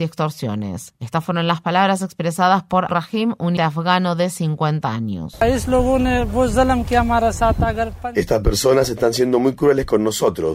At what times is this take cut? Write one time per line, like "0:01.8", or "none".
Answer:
0:02.9
0:03.6